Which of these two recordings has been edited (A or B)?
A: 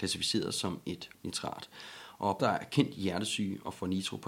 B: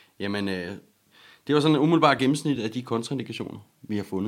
A